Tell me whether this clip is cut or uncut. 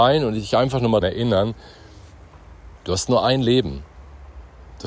cut